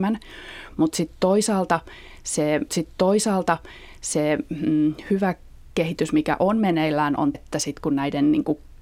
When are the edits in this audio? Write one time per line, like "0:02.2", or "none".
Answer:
0:02.7
0:07.3